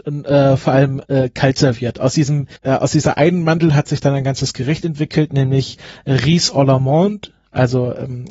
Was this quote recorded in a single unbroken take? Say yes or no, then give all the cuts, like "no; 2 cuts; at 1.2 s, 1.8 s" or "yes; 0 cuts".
no; 1 cut; at 2.6 s